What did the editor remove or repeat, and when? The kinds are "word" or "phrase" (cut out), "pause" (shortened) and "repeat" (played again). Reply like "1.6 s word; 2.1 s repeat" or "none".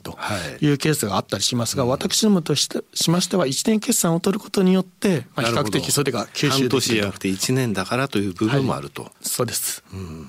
9.1 s pause